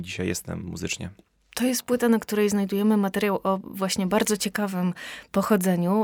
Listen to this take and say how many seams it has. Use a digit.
0